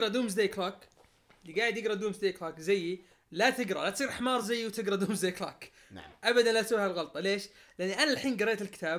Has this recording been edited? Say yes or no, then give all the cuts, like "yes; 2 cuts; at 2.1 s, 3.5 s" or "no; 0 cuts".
no; 0 cuts